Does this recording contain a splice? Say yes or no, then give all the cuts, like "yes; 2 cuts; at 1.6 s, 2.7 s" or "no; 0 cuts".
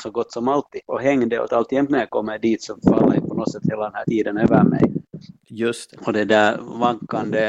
yes; 1 cut; at 1.5 s